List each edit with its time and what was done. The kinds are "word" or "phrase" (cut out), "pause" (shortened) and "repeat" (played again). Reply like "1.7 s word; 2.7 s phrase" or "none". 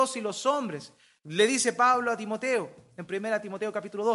none